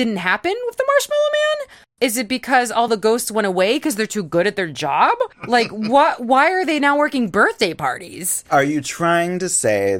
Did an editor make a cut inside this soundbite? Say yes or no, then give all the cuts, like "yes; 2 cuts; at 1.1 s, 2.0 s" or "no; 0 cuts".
no; 0 cuts